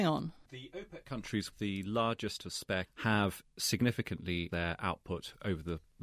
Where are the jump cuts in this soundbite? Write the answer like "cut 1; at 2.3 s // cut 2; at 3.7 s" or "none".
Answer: cut 1; at 1.5 s // cut 2; at 2.4 s // cut 3; at 2.8 s // cut 4; at 4.5 s